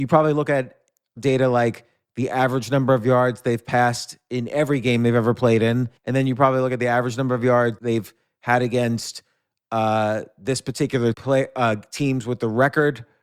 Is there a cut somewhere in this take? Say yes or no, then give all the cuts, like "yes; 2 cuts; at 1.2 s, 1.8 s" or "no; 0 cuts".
yes; 4 cuts; at 1.2 s, 6.0 s, 7.8 s, 11.1 s